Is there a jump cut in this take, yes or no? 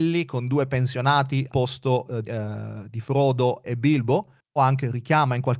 yes